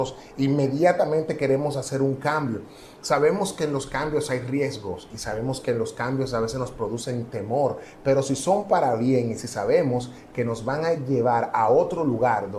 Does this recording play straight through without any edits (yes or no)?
yes